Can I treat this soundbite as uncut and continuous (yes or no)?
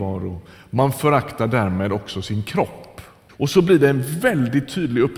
no